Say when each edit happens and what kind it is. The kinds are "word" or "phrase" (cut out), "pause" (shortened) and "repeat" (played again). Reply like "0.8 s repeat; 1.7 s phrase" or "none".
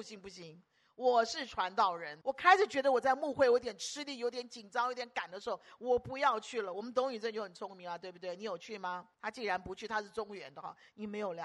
2.2 s pause; 9.1 s pause